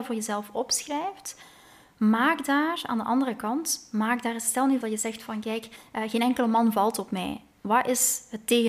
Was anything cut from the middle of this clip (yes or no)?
yes